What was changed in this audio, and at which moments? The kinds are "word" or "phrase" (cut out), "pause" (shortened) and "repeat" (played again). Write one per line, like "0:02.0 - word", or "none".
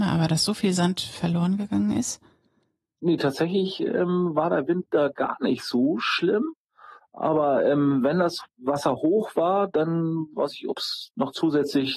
none